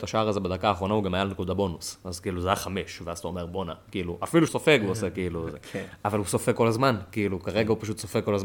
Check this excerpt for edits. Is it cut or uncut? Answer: cut